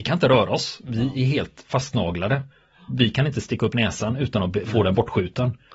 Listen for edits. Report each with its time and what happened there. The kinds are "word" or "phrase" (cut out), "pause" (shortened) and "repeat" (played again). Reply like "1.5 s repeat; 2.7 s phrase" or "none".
none

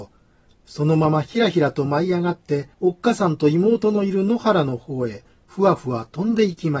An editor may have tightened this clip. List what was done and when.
2.7 s pause

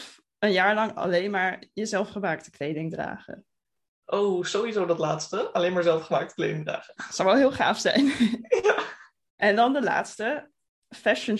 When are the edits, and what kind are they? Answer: none

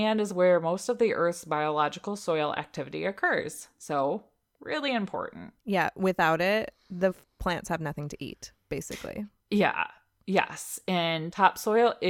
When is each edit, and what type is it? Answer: none

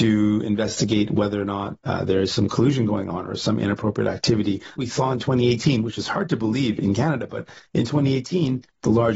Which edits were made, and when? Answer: 4.8 s word

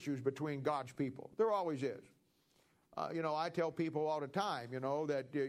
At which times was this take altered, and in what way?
none

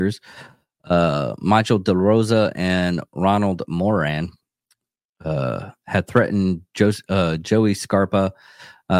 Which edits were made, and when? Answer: none

